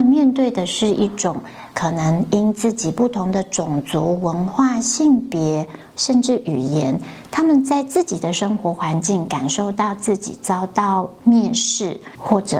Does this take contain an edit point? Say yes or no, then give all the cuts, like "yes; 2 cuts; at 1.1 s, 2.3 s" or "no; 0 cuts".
no; 0 cuts